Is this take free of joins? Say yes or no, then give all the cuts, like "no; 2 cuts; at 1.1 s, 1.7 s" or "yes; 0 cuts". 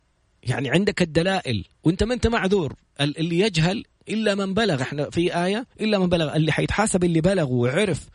no; 2 cuts; at 1.7 s, 5.7 s